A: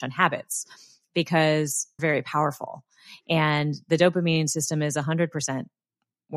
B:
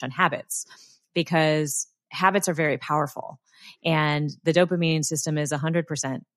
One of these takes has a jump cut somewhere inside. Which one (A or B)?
A